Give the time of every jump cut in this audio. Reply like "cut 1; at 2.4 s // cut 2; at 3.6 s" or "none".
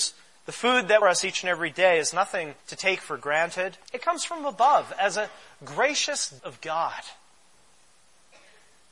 cut 1; at 1.0 s // cut 2; at 2.6 s // cut 3; at 3.9 s // cut 4; at 6.4 s